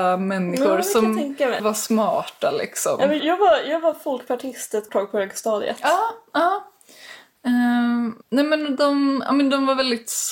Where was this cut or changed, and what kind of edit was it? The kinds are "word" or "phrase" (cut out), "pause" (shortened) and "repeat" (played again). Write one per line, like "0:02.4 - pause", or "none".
0:01.6 - word
0:03.2 - word
0:04.9 - word
0:08.2 - pause